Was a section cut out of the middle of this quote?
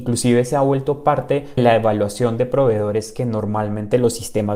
yes; 1 cut; at 1.6 s

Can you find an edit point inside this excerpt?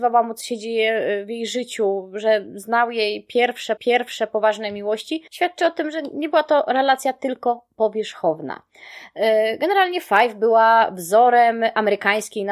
yes; 2 cuts; at 3.8 s, 5.3 s

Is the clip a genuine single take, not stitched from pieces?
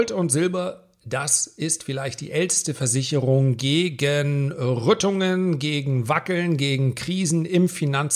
yes; 0 cuts

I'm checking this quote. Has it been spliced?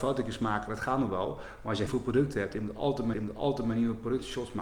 yes; 2 cuts; at 1.9 s, 3.1 s

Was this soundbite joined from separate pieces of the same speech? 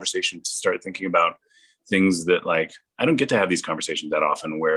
no; 0 cuts

